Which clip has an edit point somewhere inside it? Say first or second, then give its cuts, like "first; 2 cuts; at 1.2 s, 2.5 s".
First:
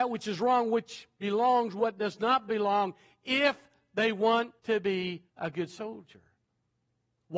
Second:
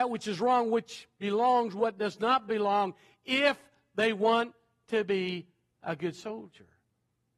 first; 2 cuts; at 4.6 s, 5.3 s